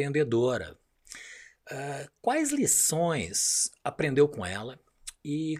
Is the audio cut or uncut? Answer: uncut